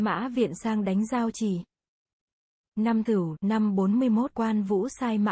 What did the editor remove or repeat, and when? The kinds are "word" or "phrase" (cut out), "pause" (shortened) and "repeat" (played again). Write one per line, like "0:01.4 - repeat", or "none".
0:03.1 - word
0:04.3 - word